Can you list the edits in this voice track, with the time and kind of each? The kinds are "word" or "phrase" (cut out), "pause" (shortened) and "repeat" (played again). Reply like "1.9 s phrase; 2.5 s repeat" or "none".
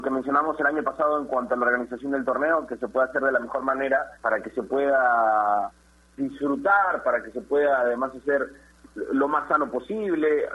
4.2 s pause